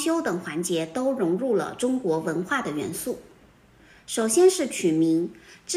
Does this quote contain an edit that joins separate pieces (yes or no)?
no